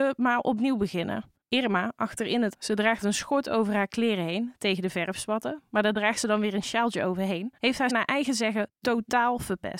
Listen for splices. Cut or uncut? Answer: cut